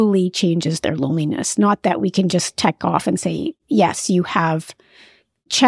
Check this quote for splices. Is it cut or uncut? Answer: uncut